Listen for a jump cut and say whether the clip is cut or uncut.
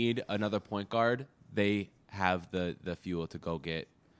uncut